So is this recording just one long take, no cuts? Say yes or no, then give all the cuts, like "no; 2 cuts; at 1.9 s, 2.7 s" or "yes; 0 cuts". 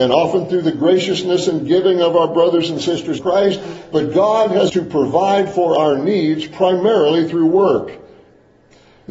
no; 2 cuts; at 3.2 s, 4.7 s